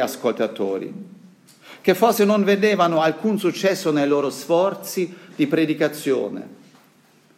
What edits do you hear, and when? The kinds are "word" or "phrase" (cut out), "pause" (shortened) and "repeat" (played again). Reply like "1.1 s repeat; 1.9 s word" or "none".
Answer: none